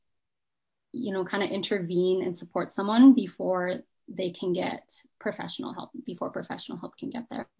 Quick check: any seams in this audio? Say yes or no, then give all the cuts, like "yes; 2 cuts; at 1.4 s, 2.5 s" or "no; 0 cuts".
no; 0 cuts